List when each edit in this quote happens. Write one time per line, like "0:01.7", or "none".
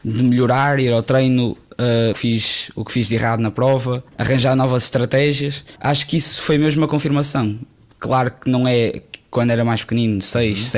0:02.1
0:04.1
0:05.8